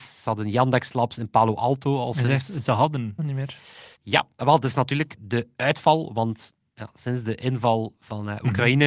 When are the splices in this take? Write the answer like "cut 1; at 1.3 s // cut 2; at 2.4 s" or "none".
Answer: cut 1; at 3.2 s // cut 2; at 4.0 s // cut 3; at 5.2 s